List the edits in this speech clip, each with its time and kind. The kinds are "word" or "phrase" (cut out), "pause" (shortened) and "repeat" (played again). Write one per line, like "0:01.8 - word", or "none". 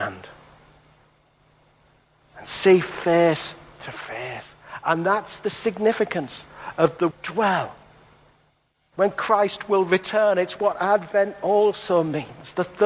0:07.1 - word